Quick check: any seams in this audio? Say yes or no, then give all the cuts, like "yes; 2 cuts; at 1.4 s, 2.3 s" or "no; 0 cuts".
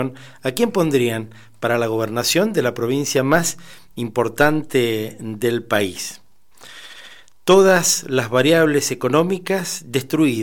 no; 0 cuts